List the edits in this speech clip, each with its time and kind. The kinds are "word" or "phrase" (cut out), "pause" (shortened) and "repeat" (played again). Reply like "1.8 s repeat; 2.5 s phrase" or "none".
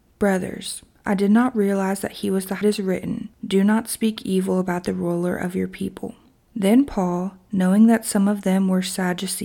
2.6 s phrase